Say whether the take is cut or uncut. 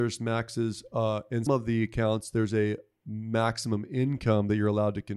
cut